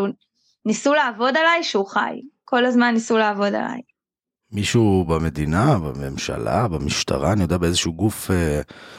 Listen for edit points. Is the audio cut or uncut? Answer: uncut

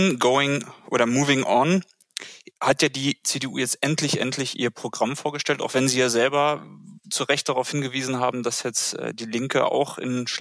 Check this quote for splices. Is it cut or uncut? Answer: cut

